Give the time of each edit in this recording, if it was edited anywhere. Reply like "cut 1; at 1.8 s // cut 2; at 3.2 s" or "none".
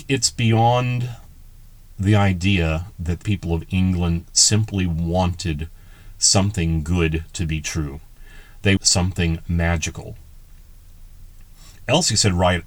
cut 1; at 2.9 s // cut 2; at 3.2 s // cut 3; at 8.8 s

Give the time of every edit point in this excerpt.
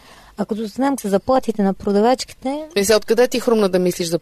cut 1; at 1.0 s

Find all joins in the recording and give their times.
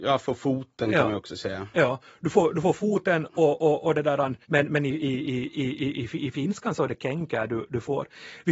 cut 1; at 4.4 s

